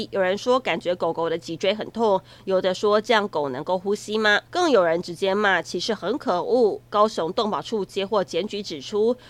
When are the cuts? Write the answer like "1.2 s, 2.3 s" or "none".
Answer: 4.5 s